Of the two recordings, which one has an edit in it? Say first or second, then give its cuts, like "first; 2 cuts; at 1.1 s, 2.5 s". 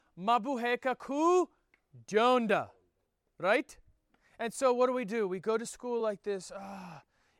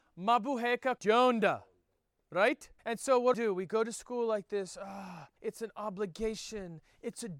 second; 4 cuts; at 1.0 s, 2.8 s, 3.3 s, 5.4 s